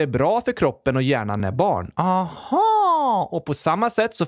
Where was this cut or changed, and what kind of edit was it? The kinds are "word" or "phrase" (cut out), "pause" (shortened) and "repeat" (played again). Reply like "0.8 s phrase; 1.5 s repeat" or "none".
1.4 s word

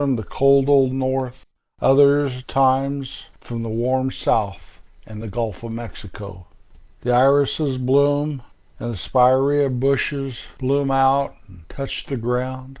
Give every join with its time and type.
none

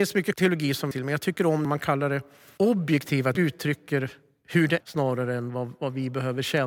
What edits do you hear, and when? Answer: 0.9 s phrase; 1.6 s phrase; 3.3 s phrase; 4.8 s word

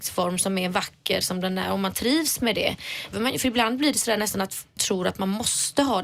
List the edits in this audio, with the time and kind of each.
3.1 s word; 4.8 s word

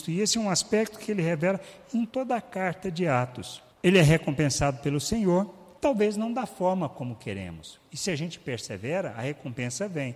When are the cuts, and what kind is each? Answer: 2.1 s word; 3.7 s pause; 5.8 s pause

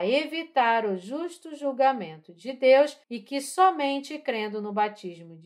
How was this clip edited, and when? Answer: 3.0 s pause

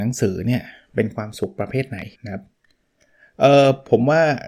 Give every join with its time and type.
2.1 s pause

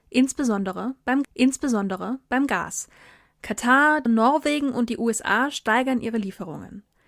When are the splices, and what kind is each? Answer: 1.2 s repeat; 4.1 s word

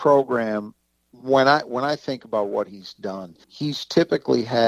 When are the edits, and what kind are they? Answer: 3.4 s pause

